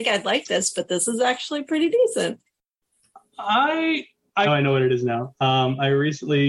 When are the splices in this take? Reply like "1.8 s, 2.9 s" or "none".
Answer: 4.4 s